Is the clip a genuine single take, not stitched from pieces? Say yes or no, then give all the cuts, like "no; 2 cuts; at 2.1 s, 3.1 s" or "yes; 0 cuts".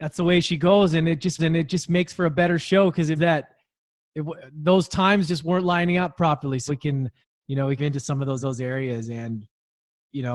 no; 6 cuts; at 1.4 s, 3.2 s, 6.7 s, 7.2 s, 7.8 s, 8.4 s